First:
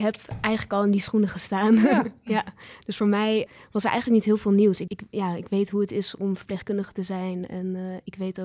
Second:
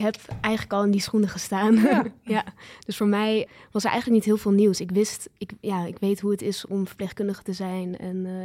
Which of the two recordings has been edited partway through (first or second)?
first